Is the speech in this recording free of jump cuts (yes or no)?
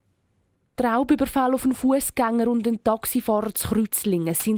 yes